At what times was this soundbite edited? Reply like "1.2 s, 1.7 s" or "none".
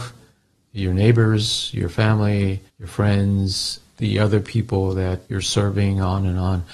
2.7 s, 5.2 s